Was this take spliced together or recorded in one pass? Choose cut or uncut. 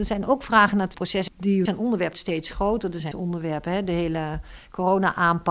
cut